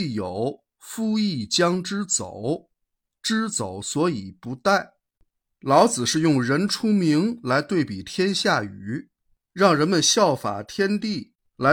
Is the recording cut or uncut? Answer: uncut